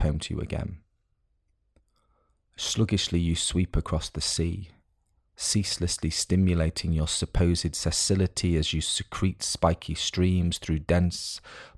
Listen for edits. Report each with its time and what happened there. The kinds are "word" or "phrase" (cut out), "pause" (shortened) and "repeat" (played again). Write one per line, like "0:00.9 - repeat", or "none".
none